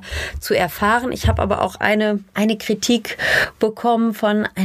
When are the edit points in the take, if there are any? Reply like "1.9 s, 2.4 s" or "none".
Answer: none